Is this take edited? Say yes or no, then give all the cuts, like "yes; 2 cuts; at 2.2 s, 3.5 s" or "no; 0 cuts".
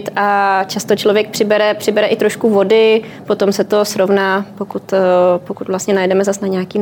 no; 0 cuts